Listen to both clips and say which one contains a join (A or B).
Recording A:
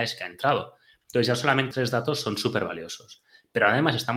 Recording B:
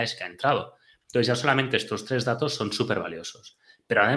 A